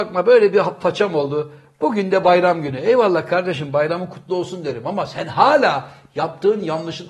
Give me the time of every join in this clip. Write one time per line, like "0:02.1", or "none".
none